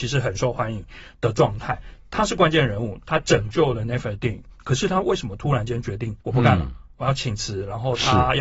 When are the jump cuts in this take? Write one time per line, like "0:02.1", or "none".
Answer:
0:06.2